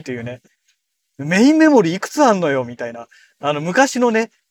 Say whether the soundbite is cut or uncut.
uncut